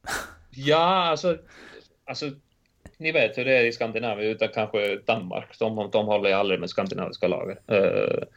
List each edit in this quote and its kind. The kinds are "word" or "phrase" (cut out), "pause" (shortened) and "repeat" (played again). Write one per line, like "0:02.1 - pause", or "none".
0:02.9 - pause